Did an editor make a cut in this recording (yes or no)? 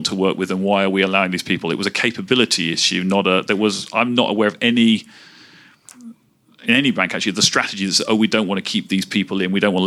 no